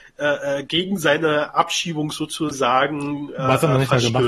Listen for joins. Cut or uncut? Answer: uncut